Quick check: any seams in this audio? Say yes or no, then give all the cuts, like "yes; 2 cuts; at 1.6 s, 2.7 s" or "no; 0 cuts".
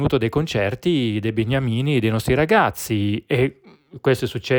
no; 0 cuts